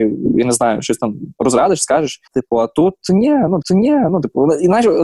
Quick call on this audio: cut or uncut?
cut